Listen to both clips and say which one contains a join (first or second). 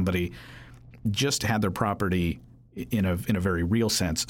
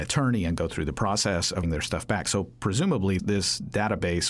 second